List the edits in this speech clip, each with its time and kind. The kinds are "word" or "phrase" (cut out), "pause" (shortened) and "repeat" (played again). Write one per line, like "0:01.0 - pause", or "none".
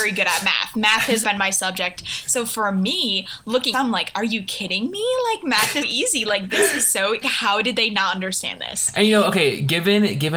0:01.2 - word
0:03.7 - phrase
0:05.8 - word
0:07.2 - word